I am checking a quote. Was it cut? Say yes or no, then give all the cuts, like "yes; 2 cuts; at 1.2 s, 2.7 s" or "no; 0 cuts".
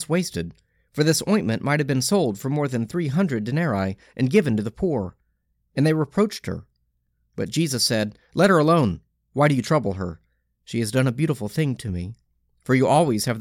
no; 0 cuts